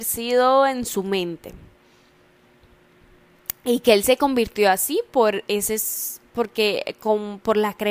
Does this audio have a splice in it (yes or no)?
no